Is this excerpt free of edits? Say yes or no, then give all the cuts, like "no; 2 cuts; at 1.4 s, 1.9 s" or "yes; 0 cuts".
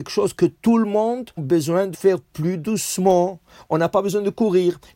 no; 2 cuts; at 1.4 s, 1.9 s